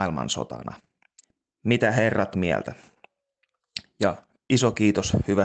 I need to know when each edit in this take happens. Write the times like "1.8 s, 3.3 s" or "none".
1.2 s, 2.3 s